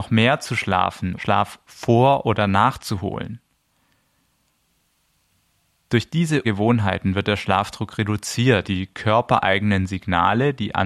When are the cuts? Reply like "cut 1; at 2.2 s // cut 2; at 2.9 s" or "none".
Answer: cut 1; at 1.2 s // cut 2; at 6.4 s // cut 3; at 8.6 s